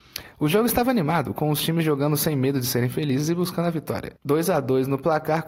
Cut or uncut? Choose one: cut